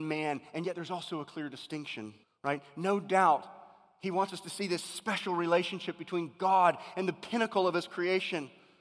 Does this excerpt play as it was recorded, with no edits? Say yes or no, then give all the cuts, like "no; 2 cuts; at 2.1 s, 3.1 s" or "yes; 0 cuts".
no; 1 cut; at 2.2 s